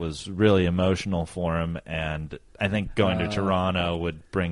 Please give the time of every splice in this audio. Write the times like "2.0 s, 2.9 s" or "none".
2.5 s